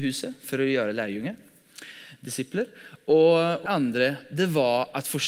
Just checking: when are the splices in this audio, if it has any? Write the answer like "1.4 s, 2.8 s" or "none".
3.7 s